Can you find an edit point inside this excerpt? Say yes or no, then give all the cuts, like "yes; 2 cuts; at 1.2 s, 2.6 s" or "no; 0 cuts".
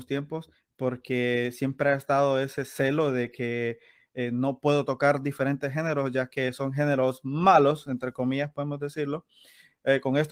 no; 0 cuts